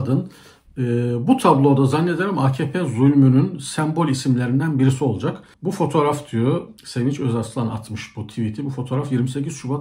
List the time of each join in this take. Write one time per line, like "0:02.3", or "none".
0:05.5
0:06.8